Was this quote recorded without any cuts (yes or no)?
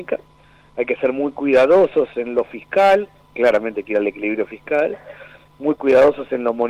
yes